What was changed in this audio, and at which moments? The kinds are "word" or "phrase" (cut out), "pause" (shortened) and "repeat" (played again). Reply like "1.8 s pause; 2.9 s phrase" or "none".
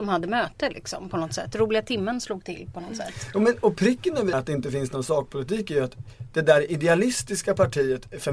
4.3 s phrase